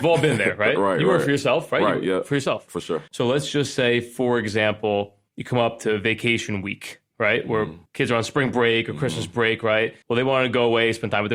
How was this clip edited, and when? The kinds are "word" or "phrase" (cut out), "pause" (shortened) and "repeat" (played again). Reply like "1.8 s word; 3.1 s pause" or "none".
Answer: 3.1 s pause; 5.3 s pause; 7.9 s pause; 10.0 s pause

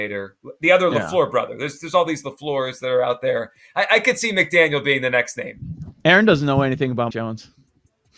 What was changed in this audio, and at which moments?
7.1 s word

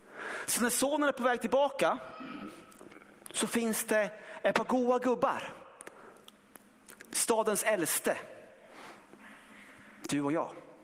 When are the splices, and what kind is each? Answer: none

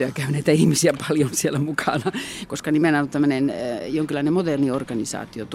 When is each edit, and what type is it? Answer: none

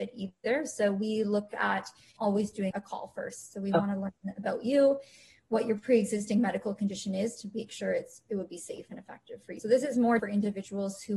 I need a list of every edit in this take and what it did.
2.2 s word; 2.7 s word; 9.6 s word; 10.2 s word

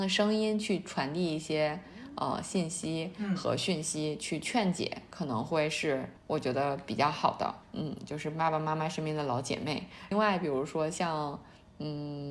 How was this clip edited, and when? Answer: 6.2 s pause; 7.6 s pause

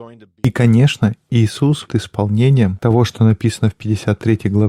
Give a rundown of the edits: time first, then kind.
1.9 s word

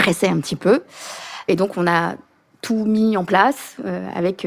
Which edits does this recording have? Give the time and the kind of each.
none

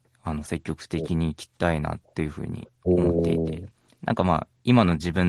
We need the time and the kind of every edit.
none

